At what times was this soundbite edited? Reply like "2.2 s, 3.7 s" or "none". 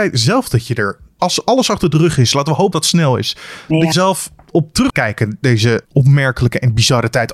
1.2 s, 2.7 s, 3.9 s, 4.9 s, 5.8 s